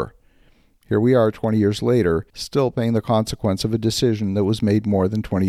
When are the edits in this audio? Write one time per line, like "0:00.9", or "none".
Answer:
0:02.3